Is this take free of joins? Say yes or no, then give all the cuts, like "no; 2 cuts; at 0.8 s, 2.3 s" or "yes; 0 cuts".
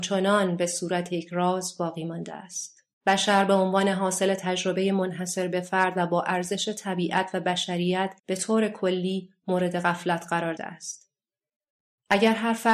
no; 3 cuts; at 2.9 s, 8.2 s, 10.6 s